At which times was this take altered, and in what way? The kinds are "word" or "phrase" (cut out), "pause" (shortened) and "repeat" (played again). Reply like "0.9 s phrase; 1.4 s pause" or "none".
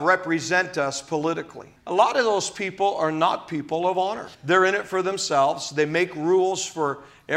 1.8 s pause; 4.3 s pause